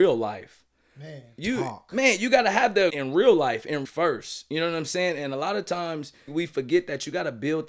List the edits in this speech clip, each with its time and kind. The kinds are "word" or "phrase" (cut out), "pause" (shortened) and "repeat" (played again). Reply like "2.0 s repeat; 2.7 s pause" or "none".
2.9 s word; 3.8 s word; 6.3 s word